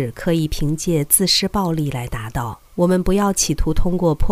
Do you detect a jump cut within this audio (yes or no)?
yes